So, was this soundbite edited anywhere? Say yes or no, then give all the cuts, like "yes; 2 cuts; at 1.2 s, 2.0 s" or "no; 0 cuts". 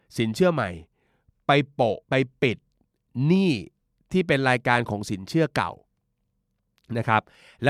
yes; 1 cut; at 2.0 s